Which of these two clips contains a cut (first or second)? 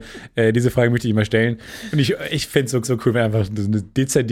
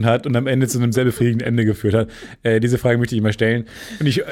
first